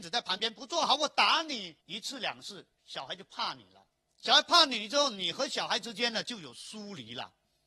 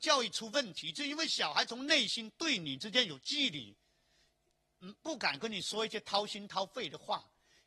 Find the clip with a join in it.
first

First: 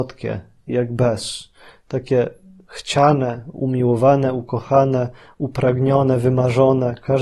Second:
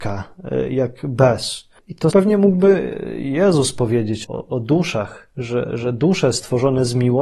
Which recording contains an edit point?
second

